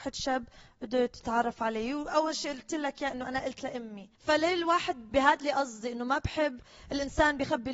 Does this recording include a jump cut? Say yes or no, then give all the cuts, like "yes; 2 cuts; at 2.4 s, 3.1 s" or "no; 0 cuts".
yes; 2 cuts; at 4.1 s, 5.1 s